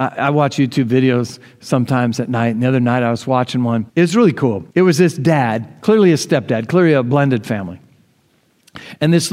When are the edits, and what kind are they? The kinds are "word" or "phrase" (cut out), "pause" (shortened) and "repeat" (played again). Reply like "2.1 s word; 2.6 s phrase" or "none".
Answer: 3.9 s pause; 4.7 s pause